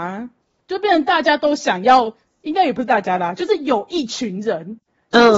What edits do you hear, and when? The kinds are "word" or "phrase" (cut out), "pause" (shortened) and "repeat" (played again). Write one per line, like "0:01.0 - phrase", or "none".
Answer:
none